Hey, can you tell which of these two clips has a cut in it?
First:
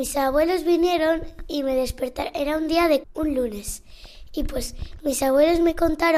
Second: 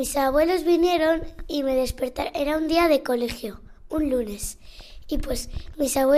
first; 1 cut; at 3.0 s

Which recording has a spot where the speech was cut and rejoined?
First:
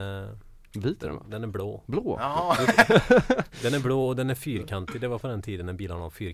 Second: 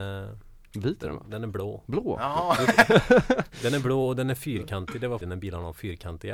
second; 1 cut; at 5.2 s

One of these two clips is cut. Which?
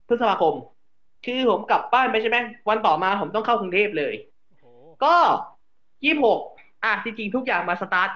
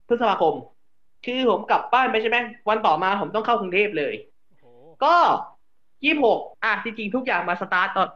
second; 1 cut; at 6.5 s

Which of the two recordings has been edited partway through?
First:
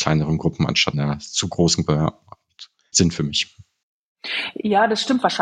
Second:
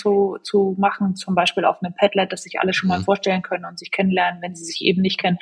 first; 3 cuts; at 0.9 s, 1.9 s, 2.9 s

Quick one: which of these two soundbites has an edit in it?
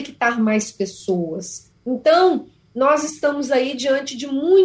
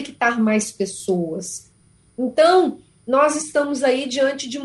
first; 1 cut; at 1.8 s

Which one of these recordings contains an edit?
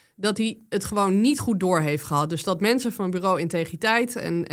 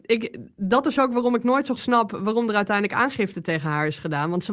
second; 1 cut; at 1.7 s

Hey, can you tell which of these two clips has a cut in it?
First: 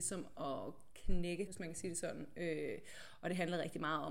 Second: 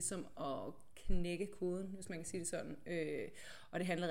first; 1 cut; at 1.5 s

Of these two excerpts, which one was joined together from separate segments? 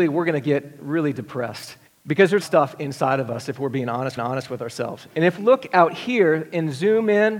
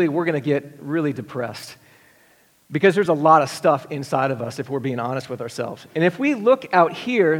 first; 4 cuts; at 1.9 s, 2.4 s, 4.2 s, 5.4 s

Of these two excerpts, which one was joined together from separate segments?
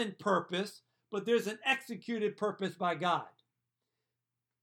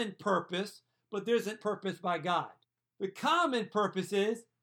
second; 2 cuts; at 1.6 s, 2.6 s

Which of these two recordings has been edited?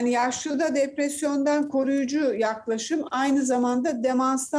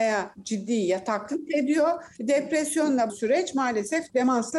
second; 1 cut; at 3.1 s

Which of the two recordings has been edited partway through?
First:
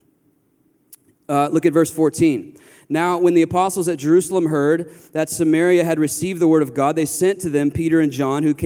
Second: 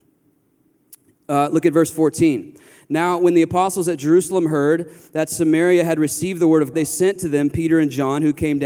second; 1 cut; at 6.7 s

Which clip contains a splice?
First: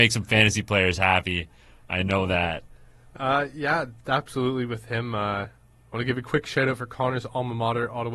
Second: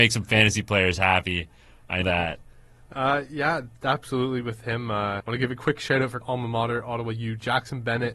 second; 3 cuts; at 2.0 s, 5.2 s, 6.2 s

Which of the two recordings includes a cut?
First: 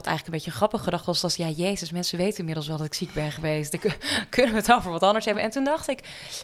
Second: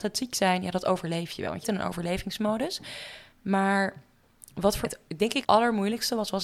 second; 3 cuts; at 1.6 s, 4.8 s, 5.4 s

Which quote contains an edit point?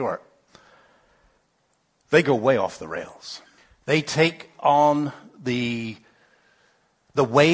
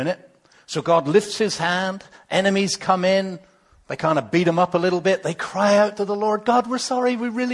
first; 1 cut; at 3.6 s

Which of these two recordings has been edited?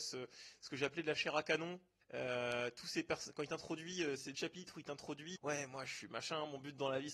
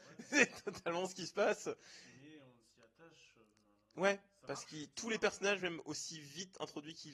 first; 3 cuts; at 2.0 s, 4.3 s, 5.4 s

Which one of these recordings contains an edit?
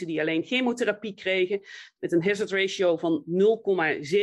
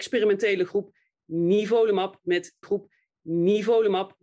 second; 1 cut; at 2.6 s

